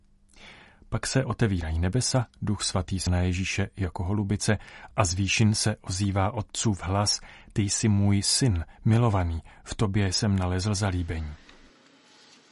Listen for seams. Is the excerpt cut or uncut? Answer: cut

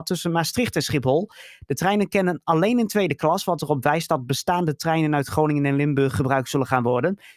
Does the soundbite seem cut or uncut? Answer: uncut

